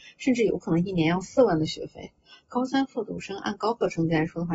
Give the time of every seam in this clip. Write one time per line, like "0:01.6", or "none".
none